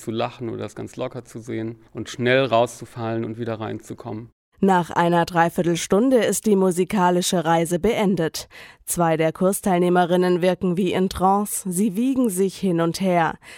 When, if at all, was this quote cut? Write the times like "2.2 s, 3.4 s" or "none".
1.9 s